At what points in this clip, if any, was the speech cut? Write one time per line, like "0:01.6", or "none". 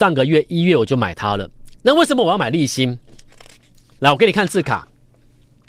none

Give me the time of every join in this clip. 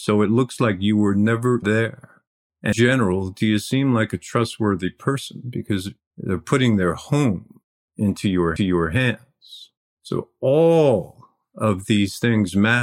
0:01.6
0:02.7
0:08.6

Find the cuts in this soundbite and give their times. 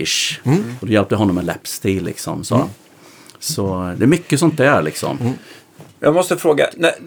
none

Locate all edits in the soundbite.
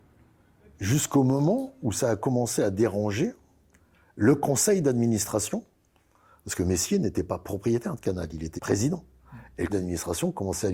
0:08.6
0:09.7

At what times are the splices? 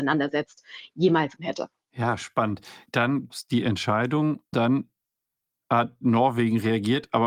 0:01.4
0:03.3
0:04.5

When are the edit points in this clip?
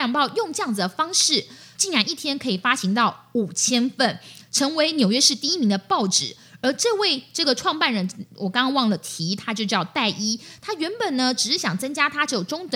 none

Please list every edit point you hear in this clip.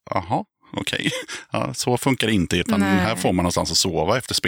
0:02.6

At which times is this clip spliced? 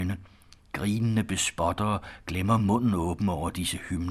none

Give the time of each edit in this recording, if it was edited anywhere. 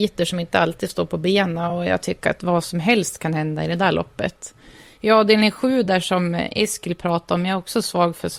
none

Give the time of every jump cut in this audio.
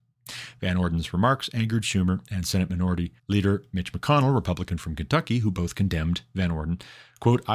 0:03.2

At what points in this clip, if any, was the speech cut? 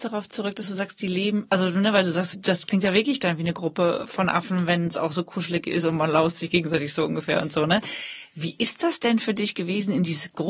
0:02.3

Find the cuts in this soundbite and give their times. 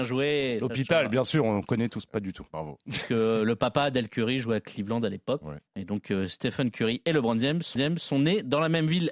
0:05.7
0:07.8

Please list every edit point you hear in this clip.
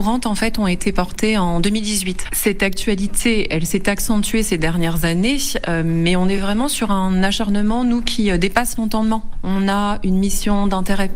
none

